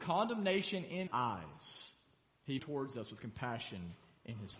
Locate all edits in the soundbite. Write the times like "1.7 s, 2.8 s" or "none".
1.1 s, 2.6 s